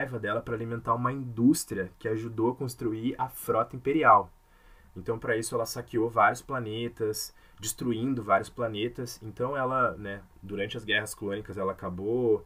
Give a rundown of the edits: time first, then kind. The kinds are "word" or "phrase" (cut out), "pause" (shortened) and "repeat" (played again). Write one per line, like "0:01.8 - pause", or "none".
0:10.3 - pause